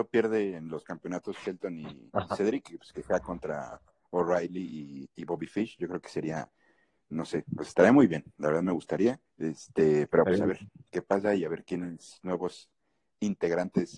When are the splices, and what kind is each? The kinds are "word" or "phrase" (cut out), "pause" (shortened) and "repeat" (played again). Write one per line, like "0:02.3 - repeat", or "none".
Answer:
0:09.3 - pause